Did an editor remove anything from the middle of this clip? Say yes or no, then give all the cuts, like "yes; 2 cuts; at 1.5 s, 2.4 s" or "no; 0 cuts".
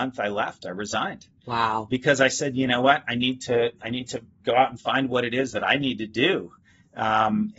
no; 0 cuts